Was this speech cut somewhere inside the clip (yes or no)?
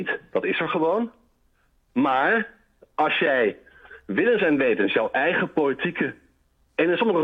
no